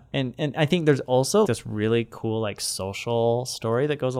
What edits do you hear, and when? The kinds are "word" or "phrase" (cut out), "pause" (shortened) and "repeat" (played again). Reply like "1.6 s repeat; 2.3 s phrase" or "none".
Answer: 1.4 s word